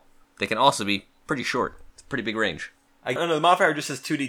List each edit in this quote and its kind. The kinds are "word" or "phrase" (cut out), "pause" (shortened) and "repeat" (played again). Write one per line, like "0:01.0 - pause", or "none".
0:01.9 - pause
0:03.2 - phrase